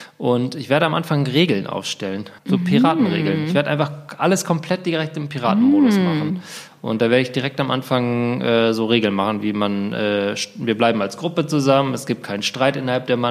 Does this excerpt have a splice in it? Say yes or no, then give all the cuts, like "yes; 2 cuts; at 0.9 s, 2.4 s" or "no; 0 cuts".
yes; 1 cut; at 2.4 s